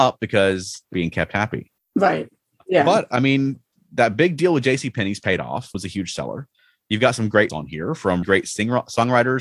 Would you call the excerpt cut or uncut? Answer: cut